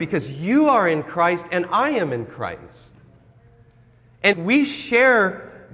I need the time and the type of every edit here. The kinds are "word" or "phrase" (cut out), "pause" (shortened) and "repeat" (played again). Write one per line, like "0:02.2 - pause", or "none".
0:04.3 - phrase